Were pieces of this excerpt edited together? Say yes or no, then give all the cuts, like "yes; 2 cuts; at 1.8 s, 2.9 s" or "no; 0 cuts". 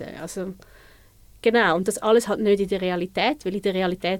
no; 0 cuts